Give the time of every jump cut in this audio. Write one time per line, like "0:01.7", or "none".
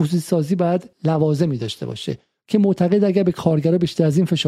0:00.9